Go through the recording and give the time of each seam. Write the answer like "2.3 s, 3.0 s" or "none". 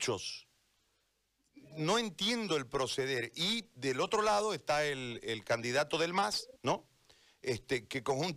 6.6 s